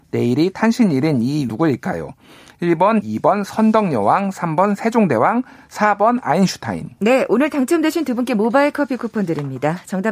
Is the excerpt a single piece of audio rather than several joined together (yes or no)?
no